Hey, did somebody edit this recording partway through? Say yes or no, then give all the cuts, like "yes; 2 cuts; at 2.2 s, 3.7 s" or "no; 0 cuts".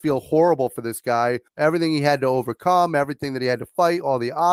yes; 1 cut; at 1.5 s